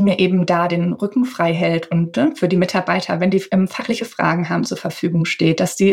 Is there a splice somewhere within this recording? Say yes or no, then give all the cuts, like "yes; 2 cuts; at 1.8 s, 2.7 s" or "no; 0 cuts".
no; 0 cuts